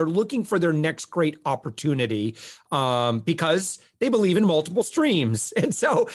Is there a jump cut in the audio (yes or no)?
no